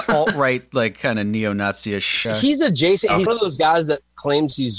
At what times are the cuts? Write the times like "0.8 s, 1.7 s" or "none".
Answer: 2.2 s, 3.3 s

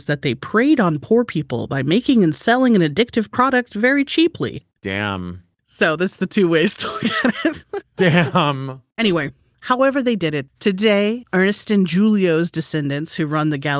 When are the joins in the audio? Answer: none

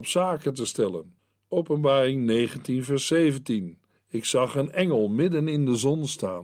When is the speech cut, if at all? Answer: 1.2 s, 4.0 s

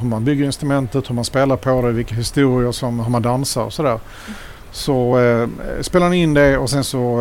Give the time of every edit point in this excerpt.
none

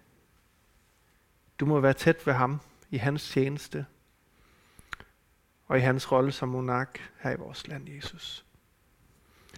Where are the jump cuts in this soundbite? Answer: none

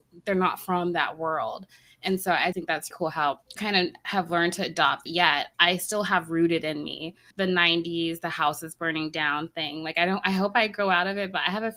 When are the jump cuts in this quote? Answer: 2.5 s, 2.9 s, 3.6 s, 5.1 s, 5.5 s, 7.3 s

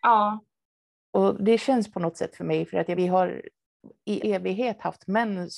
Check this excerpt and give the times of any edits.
2.3 s, 2.9 s, 4.2 s

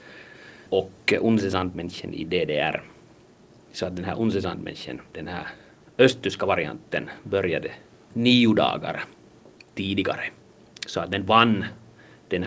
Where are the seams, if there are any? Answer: none

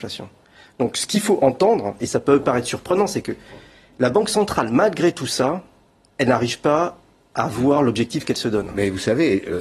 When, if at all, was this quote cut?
none

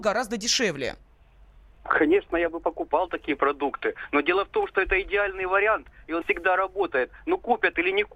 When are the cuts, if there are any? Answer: 6.2 s

